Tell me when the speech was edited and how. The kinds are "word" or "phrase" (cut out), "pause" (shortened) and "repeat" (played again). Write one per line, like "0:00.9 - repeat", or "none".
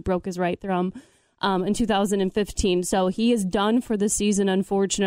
none

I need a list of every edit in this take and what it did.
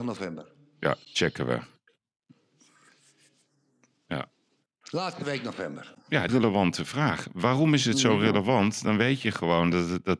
0:06.3 - phrase

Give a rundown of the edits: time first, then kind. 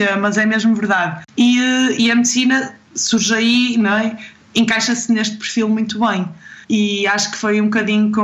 0:06.6 - pause

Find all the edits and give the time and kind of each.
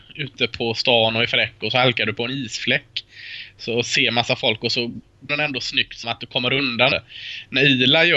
0:05.3 - word
0:06.0 - word
0:06.9 - word

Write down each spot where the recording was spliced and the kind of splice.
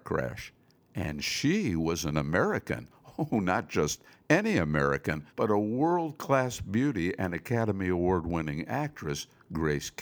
0:05.3 - pause

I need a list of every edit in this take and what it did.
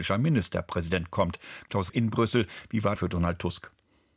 0:01.9 - word
0:02.9 - phrase

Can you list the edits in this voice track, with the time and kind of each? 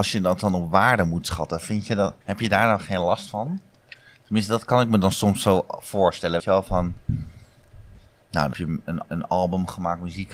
0:02.2 - pause
0:06.4 - word
0:08.5 - word
0:09.1 - repeat

